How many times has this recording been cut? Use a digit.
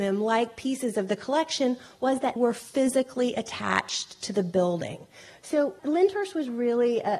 2